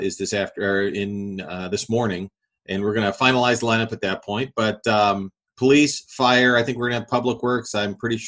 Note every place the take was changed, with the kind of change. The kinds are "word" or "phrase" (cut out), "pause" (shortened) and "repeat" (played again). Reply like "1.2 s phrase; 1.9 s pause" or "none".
none

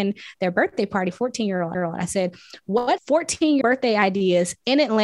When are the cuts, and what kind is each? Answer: 1.1 s word; 1.7 s repeat; 3.0 s word; 3.6 s word

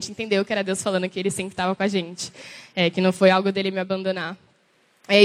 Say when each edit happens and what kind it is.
none

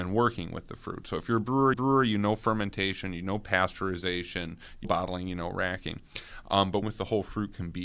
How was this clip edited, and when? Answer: 1.7 s repeat; 4.8 s word; 6.8 s word

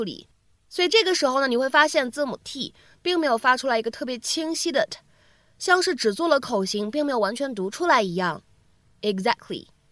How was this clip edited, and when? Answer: none

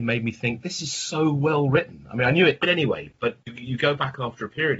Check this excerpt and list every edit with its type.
2.6 s word; 3.4 s word

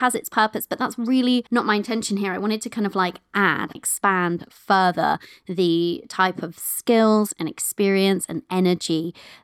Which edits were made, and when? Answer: 1.5 s pause; 3.8 s word

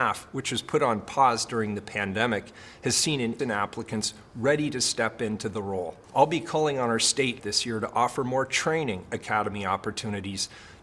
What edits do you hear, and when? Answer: 3.4 s word; 6.0 s pause; 7.4 s word

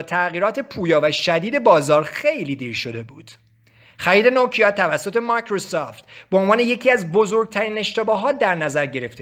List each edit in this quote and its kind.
none

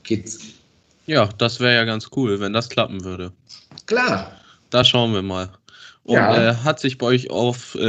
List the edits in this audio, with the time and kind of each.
none

